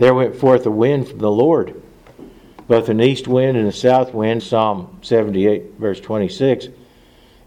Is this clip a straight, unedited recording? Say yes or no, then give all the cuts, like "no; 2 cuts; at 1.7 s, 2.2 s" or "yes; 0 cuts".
no; 1 cut; at 4.4 s